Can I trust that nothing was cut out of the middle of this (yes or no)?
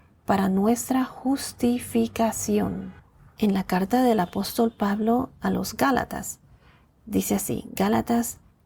yes